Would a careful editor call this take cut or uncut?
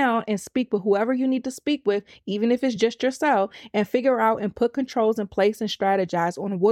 uncut